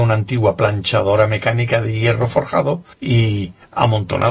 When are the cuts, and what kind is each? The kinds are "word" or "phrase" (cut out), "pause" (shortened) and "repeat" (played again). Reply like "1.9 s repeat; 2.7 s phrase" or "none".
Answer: 2.9 s pause